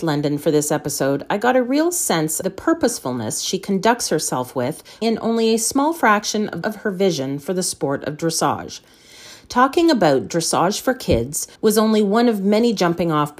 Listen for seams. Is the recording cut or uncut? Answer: cut